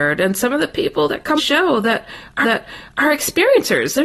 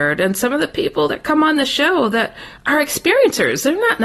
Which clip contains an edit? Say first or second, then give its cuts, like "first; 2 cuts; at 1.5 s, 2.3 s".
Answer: first; 2 cuts; at 1.4 s, 2.4 s